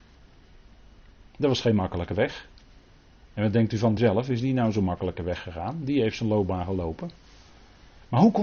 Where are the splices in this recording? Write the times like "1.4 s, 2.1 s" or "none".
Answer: 4.0 s